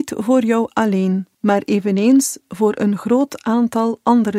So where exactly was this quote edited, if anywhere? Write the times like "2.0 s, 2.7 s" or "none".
1.3 s